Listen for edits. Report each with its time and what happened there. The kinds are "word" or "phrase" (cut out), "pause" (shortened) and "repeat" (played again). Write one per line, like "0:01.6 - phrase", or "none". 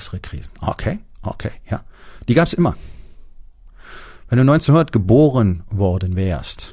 none